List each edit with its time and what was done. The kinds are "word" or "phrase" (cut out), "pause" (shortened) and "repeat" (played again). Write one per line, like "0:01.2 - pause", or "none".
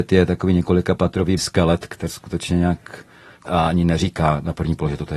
0:01.4 - word
0:02.1 - word
0:03.5 - word